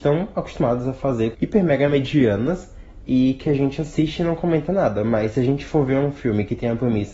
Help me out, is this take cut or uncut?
cut